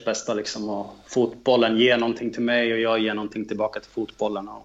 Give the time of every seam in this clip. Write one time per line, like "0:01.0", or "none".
none